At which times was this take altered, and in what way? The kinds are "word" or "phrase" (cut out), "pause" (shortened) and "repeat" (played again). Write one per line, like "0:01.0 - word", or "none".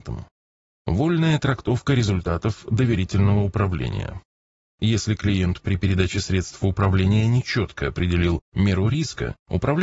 none